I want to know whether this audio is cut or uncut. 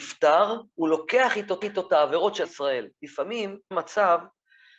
cut